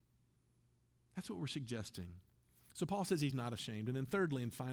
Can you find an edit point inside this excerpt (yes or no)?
no